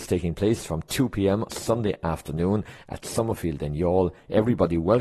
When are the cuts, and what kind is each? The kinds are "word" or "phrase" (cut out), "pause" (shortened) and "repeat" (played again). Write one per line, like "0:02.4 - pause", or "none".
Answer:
0:01.5 - word